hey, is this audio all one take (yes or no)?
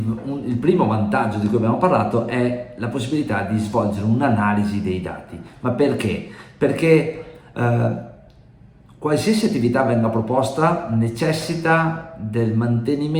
yes